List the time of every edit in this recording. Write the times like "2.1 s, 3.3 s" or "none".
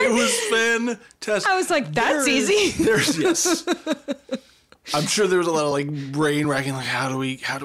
none